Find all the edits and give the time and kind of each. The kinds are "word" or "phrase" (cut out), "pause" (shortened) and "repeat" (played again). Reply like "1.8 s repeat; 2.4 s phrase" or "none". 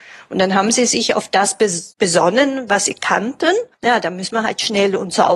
1.9 s pause; 3.7 s pause